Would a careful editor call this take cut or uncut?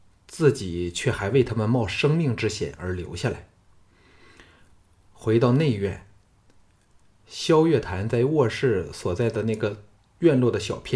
uncut